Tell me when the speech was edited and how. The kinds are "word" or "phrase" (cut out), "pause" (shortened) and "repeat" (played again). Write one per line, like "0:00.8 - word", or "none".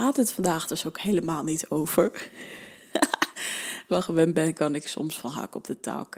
0:03.9 - phrase